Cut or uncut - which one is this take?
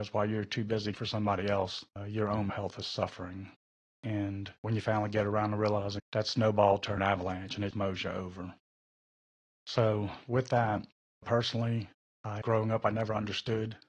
cut